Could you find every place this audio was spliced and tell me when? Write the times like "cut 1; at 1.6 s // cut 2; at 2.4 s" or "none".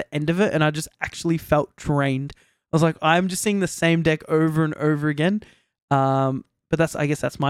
none